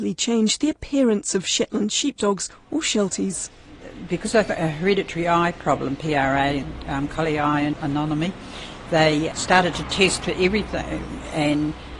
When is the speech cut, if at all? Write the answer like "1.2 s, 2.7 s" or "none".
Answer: none